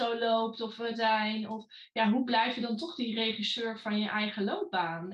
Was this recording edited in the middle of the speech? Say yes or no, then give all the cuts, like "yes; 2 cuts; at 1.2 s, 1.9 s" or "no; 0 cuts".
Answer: yes; 1 cut; at 0.9 s